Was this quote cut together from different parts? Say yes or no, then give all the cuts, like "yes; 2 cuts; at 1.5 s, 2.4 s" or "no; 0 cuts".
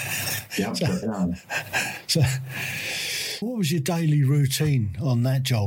yes; 2 cuts; at 1.0 s, 3.4 s